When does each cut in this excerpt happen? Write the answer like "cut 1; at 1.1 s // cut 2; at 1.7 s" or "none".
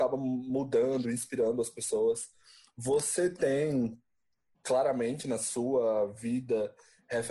none